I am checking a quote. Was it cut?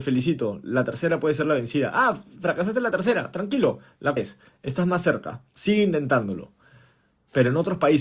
yes; 2 cuts; at 4.2 s, 5.5 s

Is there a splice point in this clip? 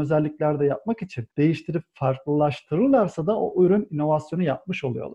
yes; 1 cut; at 1.3 s

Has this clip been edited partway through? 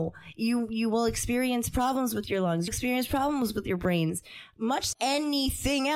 yes; 2 cuts; at 2.7 s, 4.9 s

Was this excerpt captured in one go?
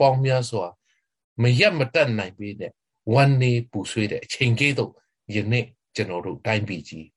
yes; 0 cuts

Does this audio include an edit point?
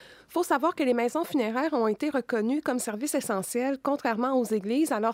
no; 0 cuts

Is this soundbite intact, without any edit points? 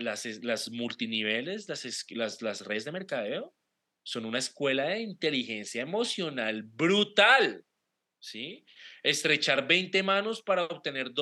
yes; 0 cuts

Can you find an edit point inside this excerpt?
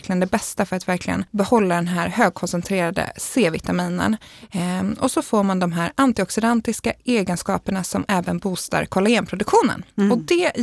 yes; 1 cut; at 1.3 s

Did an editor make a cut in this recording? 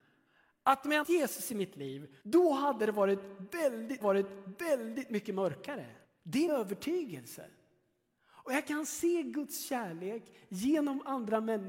yes; 5 cuts; at 1.0 s, 2.2 s, 4.0 s, 6.0 s, 6.5 s

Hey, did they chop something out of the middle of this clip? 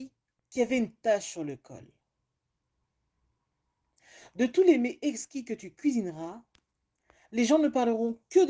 no; 0 cuts

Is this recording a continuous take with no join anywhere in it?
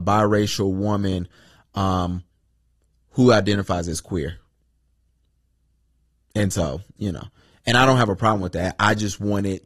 yes; 0 cuts

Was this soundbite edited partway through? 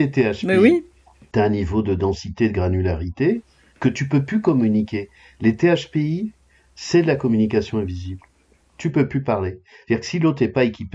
no; 0 cuts

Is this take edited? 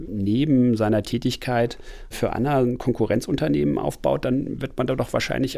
no; 0 cuts

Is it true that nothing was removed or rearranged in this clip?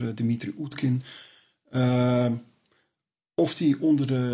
yes; 0 cuts

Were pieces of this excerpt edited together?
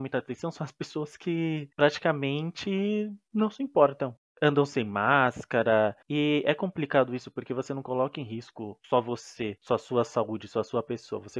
yes; 2 cuts; at 1.7 s, 6.0 s

